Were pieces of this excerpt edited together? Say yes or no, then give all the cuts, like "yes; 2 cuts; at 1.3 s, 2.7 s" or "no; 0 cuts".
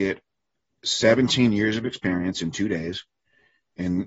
no; 0 cuts